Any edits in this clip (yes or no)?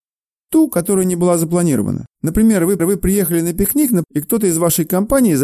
yes